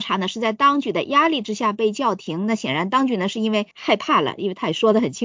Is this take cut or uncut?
cut